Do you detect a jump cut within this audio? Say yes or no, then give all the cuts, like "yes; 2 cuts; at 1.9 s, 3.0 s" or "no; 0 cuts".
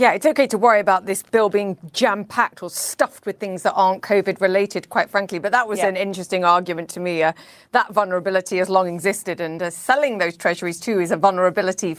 no; 0 cuts